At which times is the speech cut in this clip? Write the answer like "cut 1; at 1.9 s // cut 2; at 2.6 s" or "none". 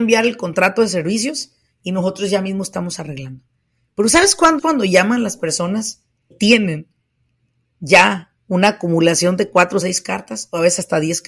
cut 1; at 4.6 s // cut 2; at 6.3 s // cut 3; at 9.8 s